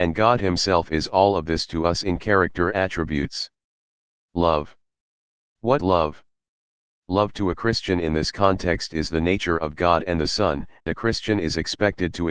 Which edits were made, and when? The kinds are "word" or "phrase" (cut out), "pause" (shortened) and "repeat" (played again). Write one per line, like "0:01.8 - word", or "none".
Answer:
0:02.7 - word
0:05.8 - word
0:10.9 - word

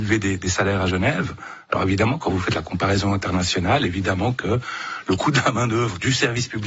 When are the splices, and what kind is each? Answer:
none

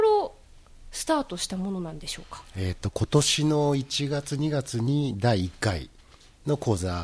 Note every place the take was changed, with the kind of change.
none

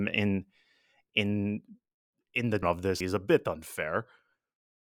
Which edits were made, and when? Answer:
0:02.6 - word
0:03.0 - word

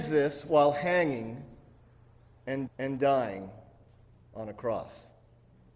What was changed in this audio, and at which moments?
0:02.7 - repeat

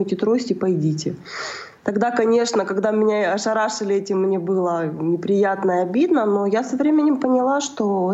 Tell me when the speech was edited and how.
none

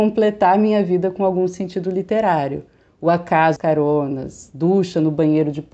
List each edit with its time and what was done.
0:03.6 - word

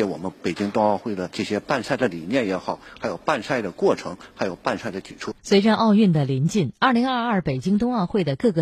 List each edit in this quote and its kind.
0:05.4 - pause

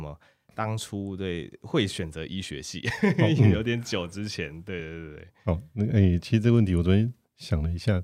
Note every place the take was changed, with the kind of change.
none

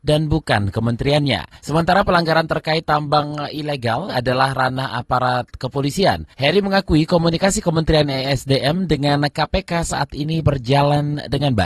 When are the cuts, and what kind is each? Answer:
0:01.6 - pause
0:06.3 - pause

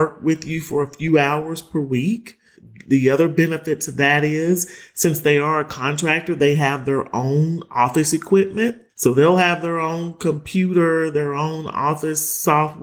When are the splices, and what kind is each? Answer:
none

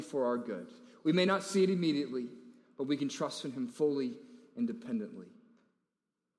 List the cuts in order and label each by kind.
none

